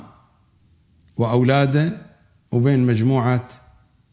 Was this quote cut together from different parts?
no; 0 cuts

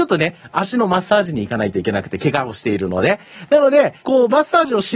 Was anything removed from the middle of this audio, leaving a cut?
yes; 1 cut; at 4.0 s

